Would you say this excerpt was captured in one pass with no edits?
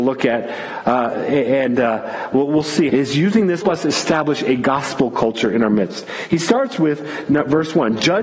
no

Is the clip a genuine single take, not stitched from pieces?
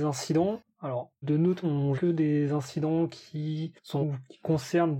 no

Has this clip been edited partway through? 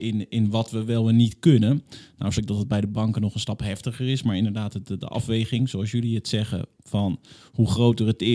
yes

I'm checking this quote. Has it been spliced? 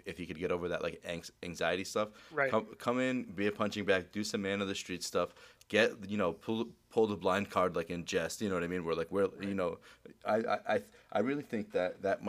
no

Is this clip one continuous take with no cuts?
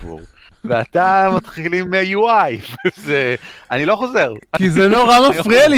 yes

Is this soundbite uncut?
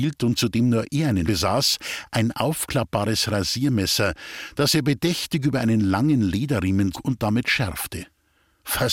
no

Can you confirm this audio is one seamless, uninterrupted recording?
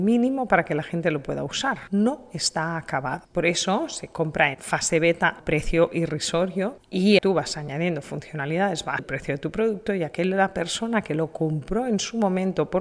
no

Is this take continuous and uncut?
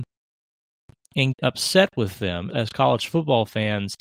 no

